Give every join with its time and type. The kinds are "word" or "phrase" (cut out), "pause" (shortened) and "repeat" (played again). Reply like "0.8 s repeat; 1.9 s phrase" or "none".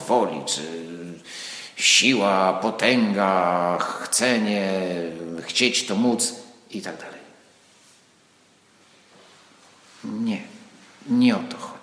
none